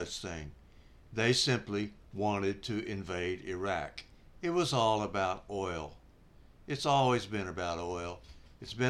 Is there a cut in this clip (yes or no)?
no